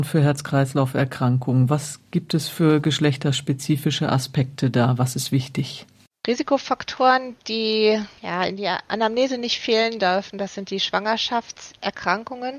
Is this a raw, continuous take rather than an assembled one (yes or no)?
yes